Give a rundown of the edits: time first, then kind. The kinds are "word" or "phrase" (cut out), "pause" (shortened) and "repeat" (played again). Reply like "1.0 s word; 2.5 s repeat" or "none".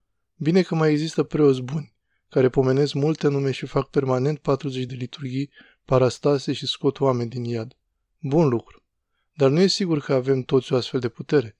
none